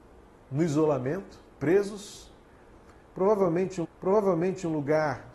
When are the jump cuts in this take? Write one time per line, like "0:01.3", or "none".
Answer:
0:01.5
0:03.8